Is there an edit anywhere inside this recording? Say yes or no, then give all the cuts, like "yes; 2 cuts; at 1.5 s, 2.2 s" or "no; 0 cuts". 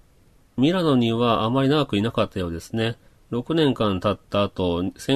no; 0 cuts